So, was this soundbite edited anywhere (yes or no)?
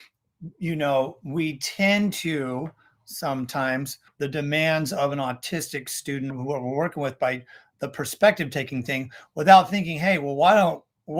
yes